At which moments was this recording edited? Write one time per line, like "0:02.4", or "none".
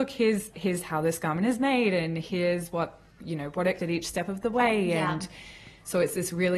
0:03.8